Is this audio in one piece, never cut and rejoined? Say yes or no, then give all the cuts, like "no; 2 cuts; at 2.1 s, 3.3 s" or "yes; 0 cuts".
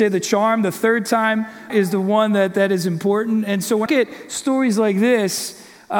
no; 2 cuts; at 1.7 s, 3.9 s